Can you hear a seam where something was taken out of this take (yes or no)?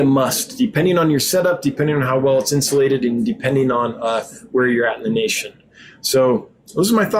no